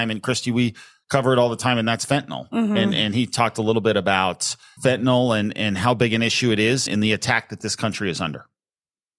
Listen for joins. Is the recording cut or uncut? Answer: cut